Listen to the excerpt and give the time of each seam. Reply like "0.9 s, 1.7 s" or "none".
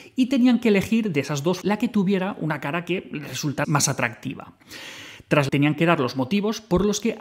1.6 s, 3.6 s, 5.5 s